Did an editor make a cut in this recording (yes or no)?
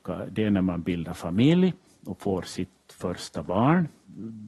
no